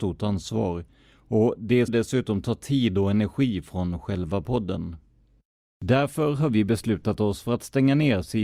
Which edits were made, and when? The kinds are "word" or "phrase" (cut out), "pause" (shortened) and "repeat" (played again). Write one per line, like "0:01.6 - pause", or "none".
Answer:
0:01.9 - word